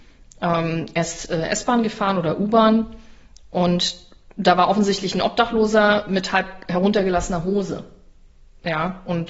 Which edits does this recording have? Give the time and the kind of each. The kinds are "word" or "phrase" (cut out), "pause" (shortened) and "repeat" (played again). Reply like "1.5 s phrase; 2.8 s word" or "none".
none